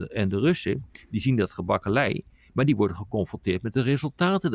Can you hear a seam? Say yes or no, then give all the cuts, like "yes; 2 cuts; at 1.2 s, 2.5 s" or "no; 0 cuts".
no; 0 cuts